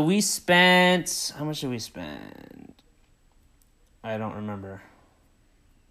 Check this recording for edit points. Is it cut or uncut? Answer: uncut